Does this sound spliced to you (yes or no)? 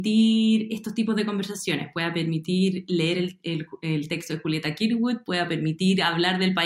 no